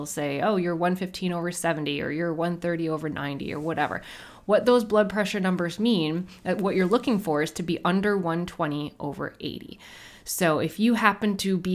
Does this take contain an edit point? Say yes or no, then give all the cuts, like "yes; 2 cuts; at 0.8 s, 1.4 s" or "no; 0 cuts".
no; 0 cuts